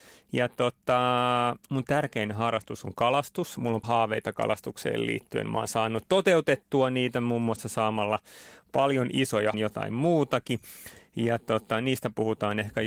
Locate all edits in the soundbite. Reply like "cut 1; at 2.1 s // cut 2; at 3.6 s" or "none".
cut 1; at 1.6 s // cut 2; at 3.8 s // cut 3; at 9.5 s

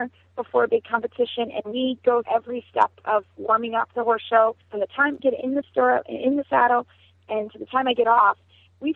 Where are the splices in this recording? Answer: cut 1; at 2.2 s // cut 2; at 4.6 s // cut 3; at 5.2 s

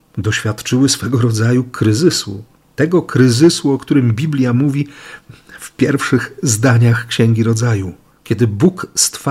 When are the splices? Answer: none

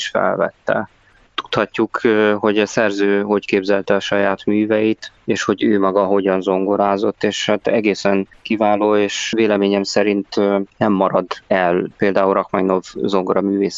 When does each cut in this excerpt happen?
cut 1; at 10.7 s

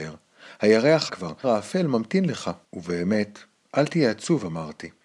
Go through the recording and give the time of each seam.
cut 1; at 1.1 s // cut 2; at 1.4 s // cut 3; at 2.6 s

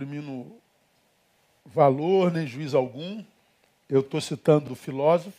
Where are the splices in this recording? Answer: none

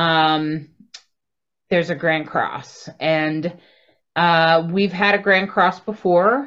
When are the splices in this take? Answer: none

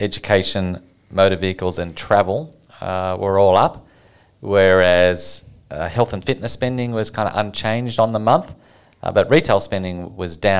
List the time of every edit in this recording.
none

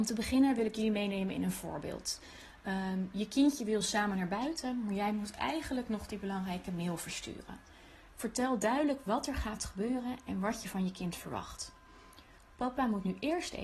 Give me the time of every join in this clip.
none

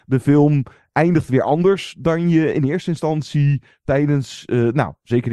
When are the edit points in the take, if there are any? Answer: none

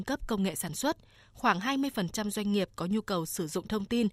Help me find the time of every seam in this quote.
none

